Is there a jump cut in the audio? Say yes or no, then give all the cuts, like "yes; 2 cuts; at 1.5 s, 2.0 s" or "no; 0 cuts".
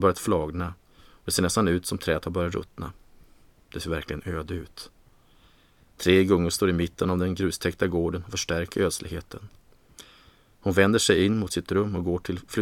no; 0 cuts